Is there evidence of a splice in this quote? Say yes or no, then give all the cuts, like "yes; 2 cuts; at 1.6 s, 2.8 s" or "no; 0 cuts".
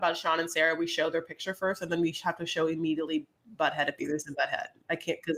no; 0 cuts